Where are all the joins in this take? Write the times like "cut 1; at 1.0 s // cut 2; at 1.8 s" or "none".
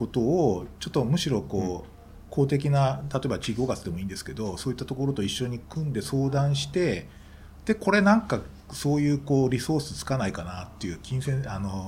cut 1; at 8.6 s

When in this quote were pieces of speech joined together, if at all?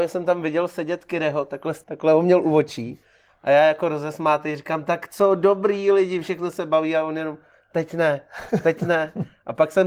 cut 1; at 1.8 s

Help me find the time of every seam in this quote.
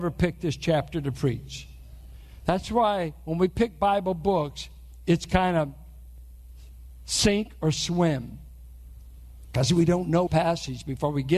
cut 1; at 10.3 s

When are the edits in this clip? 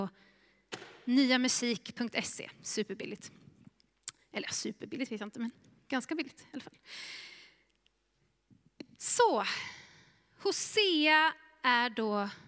none

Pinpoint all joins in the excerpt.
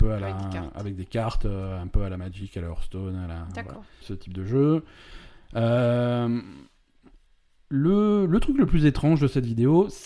cut 1; at 4.0 s

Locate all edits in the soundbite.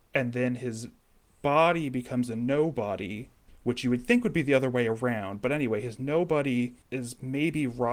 cut 1; at 6.8 s

